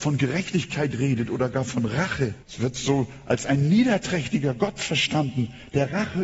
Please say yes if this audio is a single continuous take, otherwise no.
no